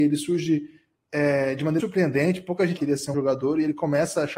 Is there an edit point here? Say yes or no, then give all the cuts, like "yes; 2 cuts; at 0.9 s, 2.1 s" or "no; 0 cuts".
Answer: yes; 3 cuts; at 1.8 s, 2.8 s, 3.1 s